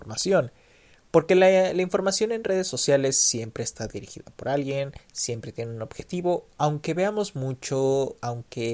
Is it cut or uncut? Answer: uncut